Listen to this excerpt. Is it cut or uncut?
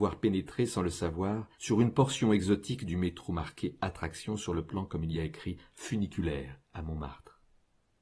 cut